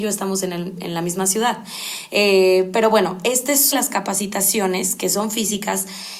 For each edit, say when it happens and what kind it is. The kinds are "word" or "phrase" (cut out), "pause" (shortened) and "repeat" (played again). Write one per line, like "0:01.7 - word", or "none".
0:03.7 - phrase